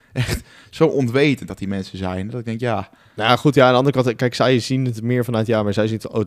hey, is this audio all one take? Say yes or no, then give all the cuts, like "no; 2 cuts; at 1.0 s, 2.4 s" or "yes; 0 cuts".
yes; 0 cuts